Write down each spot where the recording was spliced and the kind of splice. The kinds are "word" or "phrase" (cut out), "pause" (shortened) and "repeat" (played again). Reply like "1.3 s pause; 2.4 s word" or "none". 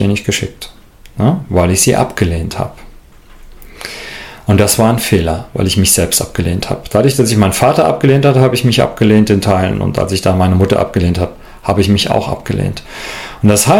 none